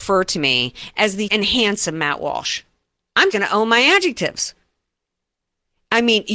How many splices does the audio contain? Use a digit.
2